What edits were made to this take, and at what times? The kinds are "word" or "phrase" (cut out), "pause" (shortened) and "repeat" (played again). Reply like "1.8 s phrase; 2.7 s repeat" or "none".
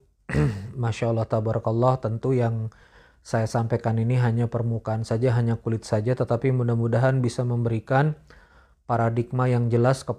none